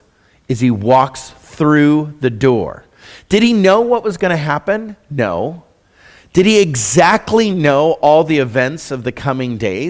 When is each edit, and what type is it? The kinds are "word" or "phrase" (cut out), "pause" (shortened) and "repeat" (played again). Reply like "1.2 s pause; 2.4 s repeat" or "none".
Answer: none